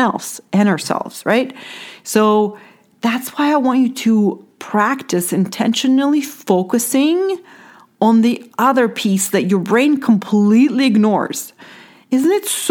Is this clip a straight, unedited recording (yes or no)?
yes